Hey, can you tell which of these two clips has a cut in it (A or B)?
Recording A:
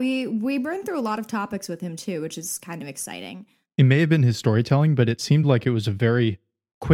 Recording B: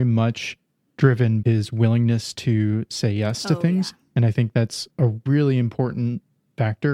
B